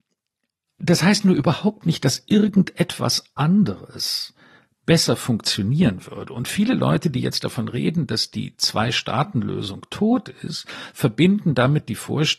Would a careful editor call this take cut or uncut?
uncut